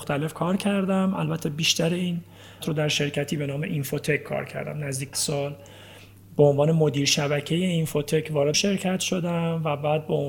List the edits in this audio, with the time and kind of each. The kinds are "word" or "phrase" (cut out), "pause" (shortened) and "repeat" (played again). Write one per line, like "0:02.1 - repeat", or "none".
0:02.6 - word
0:05.1 - word
0:08.5 - word